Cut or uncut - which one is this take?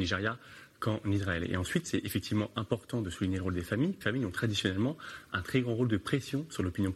cut